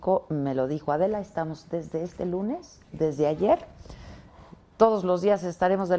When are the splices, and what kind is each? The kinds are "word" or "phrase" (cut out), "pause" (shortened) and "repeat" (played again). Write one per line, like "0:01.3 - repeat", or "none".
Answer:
0:02.8 - pause